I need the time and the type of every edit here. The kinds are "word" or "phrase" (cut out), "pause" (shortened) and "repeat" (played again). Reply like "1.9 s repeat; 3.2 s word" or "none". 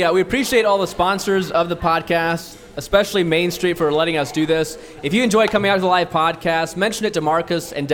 none